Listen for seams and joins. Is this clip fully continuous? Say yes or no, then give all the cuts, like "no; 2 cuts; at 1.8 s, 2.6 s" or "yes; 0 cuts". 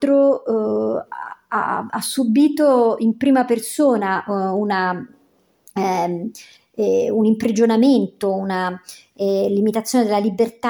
yes; 0 cuts